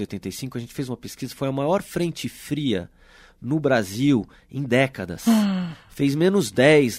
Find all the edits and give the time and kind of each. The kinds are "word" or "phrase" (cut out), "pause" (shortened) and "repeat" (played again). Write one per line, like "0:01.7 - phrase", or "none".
none